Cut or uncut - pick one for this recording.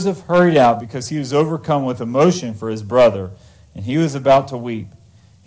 uncut